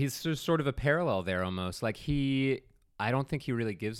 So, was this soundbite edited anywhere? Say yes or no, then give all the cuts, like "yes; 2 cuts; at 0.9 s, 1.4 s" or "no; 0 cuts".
no; 0 cuts